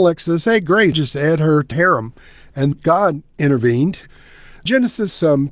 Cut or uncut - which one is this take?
cut